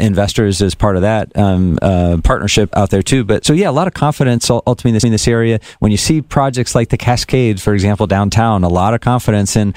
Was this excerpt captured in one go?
no; 3 cuts; at 2.7 s, 3.4 s, 5.0 s

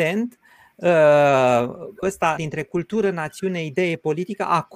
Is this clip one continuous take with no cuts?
no; 2 cuts; at 2.0 s, 2.4 s

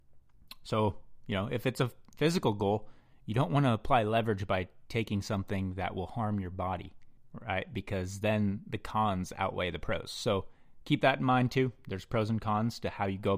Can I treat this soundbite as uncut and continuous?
yes; 0 cuts

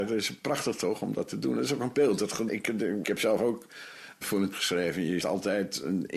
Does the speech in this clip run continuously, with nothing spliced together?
no; 6 cuts; at 1.9 s, 2.5 s, 3.0 s, 4.2 s, 4.5 s, 5.2 s

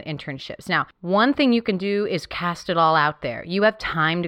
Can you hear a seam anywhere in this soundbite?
no; 0 cuts

